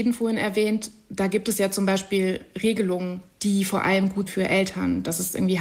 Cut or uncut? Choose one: cut